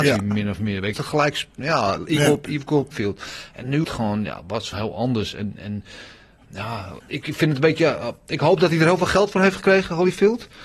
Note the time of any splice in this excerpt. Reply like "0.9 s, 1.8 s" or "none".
0.9 s, 2.9 s, 3.8 s, 4.7 s, 7.0 s